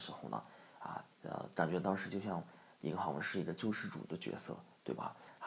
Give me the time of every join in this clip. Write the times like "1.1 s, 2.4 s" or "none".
1.1 s